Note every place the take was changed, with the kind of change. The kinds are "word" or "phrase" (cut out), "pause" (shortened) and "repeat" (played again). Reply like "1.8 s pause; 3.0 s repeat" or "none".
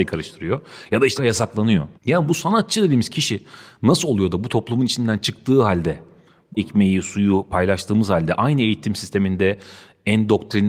1.2 s word; 2.0 s pause; 6.6 s word